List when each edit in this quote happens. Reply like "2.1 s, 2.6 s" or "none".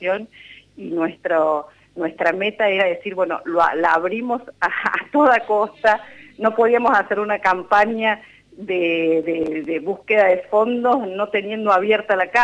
none